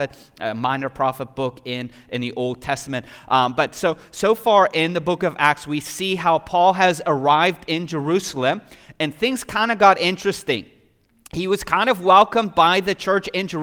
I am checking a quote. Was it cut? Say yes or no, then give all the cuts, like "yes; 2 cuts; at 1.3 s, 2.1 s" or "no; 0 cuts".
no; 0 cuts